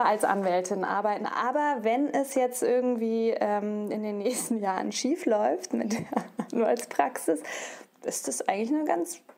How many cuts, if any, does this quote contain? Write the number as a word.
zero